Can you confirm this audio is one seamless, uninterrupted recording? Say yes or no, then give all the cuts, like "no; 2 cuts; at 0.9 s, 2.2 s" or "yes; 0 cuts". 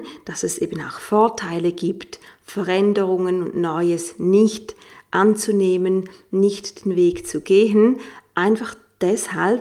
yes; 0 cuts